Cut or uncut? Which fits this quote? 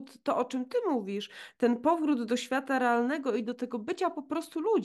uncut